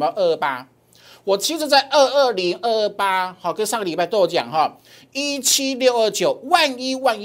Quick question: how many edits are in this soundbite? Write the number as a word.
zero